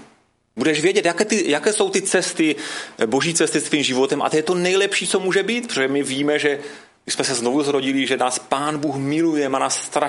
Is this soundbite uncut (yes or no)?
yes